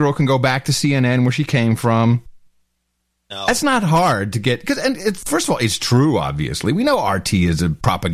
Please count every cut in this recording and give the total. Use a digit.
0